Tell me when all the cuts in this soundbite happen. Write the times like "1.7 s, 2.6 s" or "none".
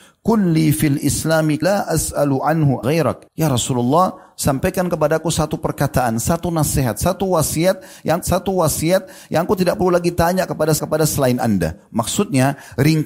1.6 s, 2.8 s, 3.3 s, 8.2 s, 10.8 s